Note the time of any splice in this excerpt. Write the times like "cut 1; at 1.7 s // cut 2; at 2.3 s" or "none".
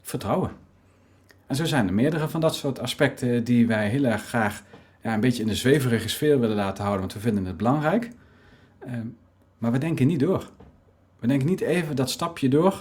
none